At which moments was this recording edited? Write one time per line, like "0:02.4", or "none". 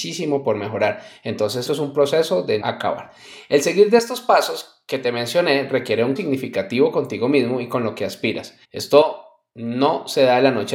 0:01.7
0:02.6
0:06.2
0:08.6

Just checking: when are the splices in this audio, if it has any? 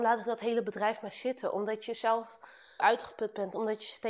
0:02.8

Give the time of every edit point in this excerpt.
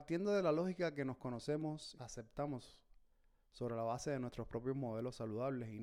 0:02.0

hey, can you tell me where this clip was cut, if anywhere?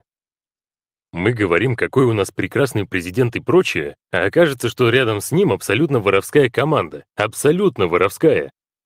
0:04.0
0:07.1

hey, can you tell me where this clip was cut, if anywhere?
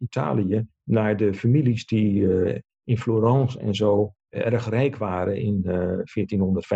none

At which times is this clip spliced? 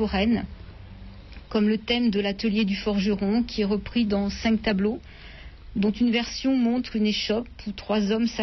none

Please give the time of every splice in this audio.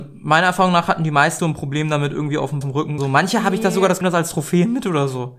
0:01.4
0:02.6
0:03.0
0:04.0

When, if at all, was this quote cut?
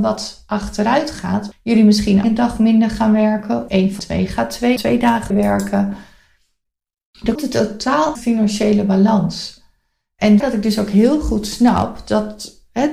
0:01.5
0:02.2
0:03.7
0:04.0
0:04.8
0:05.3
0:07.4
0:08.2
0:10.4

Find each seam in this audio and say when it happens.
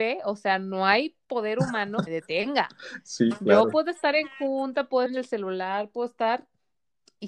0:02.1
0:05.1

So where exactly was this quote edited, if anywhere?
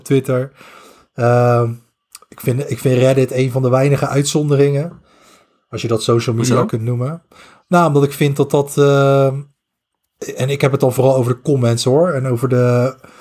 none

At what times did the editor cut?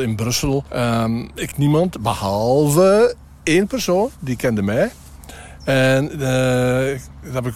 0:01.5

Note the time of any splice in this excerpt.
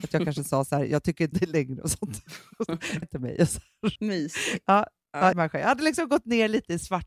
0:01.3
0:03.0
0:04.0
0:05.3

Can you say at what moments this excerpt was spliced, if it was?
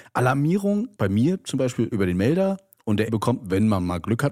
0:01.0
0:01.9
0:03.1

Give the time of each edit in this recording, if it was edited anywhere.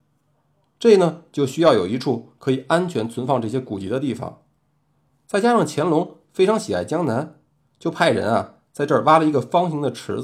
none

